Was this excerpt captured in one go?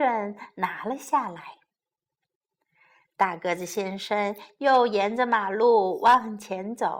yes; 0 cuts

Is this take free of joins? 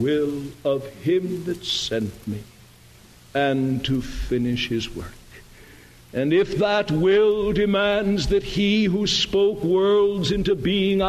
yes; 0 cuts

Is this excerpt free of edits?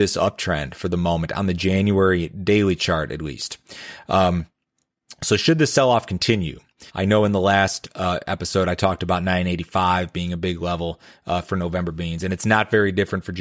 no; 1 cut; at 6.9 s

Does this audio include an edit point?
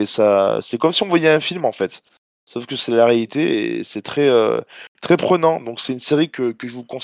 no; 0 cuts

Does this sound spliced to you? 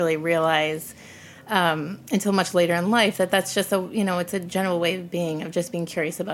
no; 0 cuts

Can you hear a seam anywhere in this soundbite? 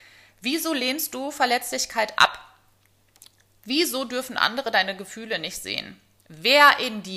no; 0 cuts

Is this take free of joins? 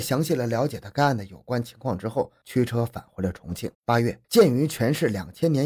no; 2 cuts; at 3.7 s, 4.2 s

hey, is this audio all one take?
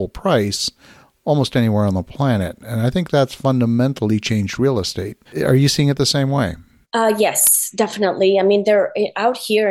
no; 2 cuts; at 5.3 s, 6.8 s

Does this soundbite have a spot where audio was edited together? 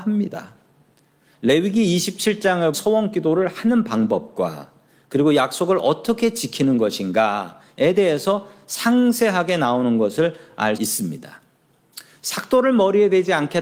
yes; 2 cuts; at 2.7 s, 10.8 s

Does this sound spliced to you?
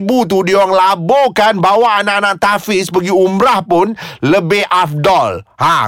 no; 0 cuts

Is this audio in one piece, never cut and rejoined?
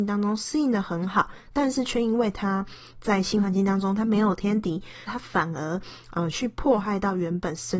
no; 1 cut; at 5.1 s

